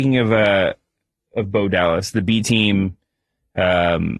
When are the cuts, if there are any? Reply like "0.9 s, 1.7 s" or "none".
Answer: none